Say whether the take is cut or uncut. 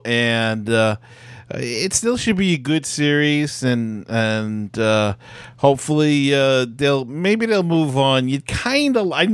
uncut